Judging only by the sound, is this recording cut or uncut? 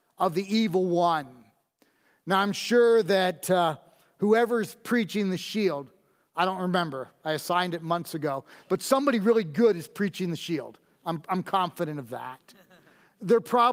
uncut